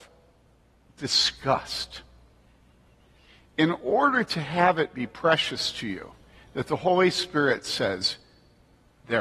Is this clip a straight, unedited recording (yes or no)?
yes